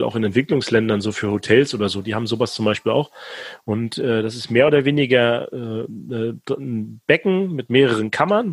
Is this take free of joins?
yes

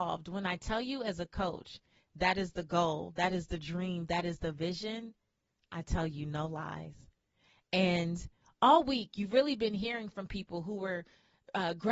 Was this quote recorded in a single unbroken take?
yes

